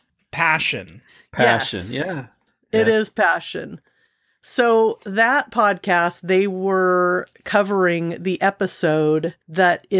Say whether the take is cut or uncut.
uncut